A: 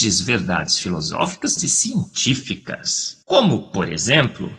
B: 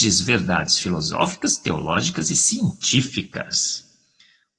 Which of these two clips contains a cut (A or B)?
A